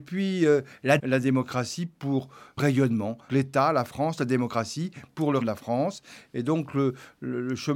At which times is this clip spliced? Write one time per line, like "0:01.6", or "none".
0:01.0
0:02.6
0:03.3
0:05.4